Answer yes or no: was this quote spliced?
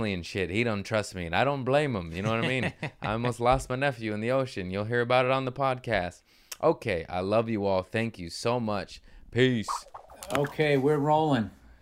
no